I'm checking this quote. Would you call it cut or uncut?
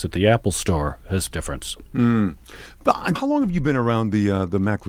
cut